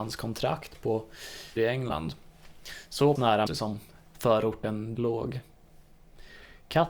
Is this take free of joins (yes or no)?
no